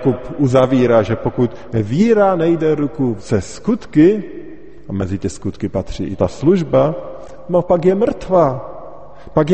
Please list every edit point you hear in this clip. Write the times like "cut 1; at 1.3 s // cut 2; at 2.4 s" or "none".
cut 1; at 3.2 s // cut 2; at 6.2 s